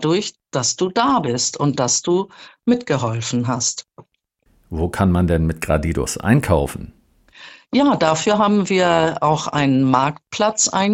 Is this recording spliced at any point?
no; 0 cuts

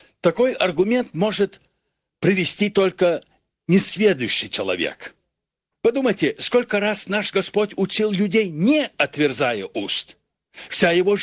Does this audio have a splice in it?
no; 0 cuts

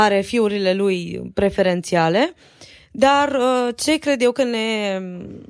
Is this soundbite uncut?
yes; 0 cuts

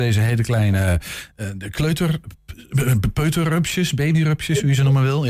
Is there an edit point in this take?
no; 0 cuts

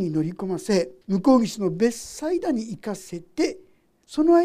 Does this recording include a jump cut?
yes; 1 cut; at 1.0 s

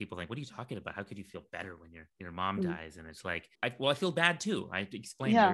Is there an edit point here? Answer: yes; 2 cuts; at 2.1 s, 3.5 s

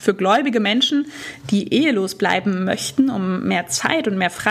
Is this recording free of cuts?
yes; 0 cuts

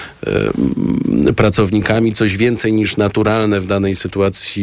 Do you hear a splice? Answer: no; 0 cuts

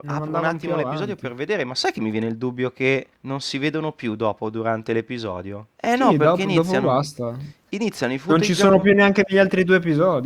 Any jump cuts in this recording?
yes; 2 cuts; at 3.1 s, 5.7 s

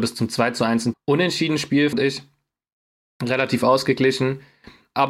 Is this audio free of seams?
no; 2 cuts; at 0.9 s, 1.9 s

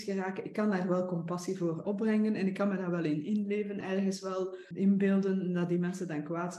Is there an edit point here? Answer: yes; 3 cuts; at 1.8 s, 3.8 s, 4.7 s

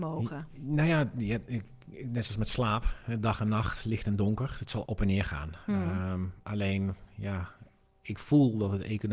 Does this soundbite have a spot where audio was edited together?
yes; 2 cuts; at 2.3 s, 4.9 s

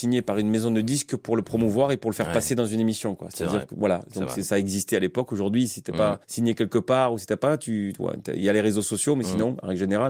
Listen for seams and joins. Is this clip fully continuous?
no; 1 cut; at 6.2 s

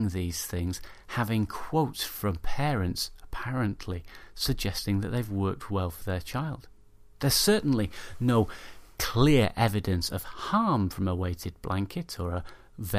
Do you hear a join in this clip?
no; 0 cuts

